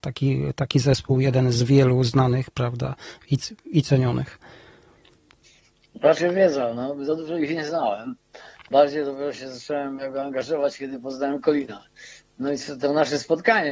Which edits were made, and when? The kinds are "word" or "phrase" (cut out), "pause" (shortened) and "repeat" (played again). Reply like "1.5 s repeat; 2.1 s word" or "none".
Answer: none